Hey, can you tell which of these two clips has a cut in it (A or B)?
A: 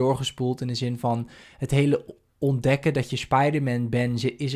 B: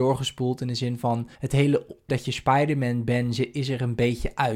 B